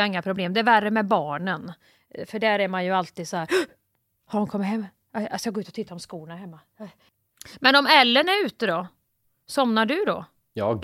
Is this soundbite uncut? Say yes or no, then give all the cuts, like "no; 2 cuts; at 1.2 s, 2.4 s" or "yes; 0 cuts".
yes; 0 cuts